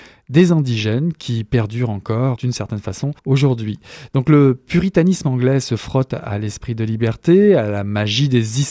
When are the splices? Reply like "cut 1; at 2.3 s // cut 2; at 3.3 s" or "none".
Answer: cut 1; at 2.4 s // cut 2; at 3.2 s